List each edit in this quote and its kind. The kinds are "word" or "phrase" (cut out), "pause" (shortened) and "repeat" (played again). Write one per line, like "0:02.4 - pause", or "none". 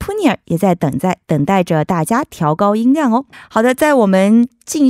0:03.3 - pause